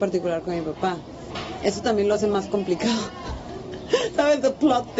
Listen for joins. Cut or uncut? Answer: uncut